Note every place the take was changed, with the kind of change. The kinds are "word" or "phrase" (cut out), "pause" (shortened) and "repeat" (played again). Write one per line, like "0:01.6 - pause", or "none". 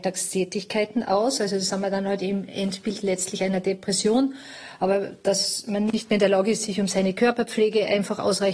none